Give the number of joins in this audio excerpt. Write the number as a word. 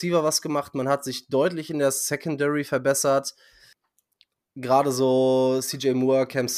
zero